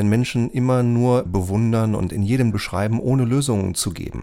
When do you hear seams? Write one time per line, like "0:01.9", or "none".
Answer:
0:01.3
0:02.5